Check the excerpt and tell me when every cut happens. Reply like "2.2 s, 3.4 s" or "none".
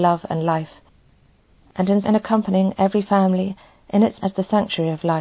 2.0 s, 4.2 s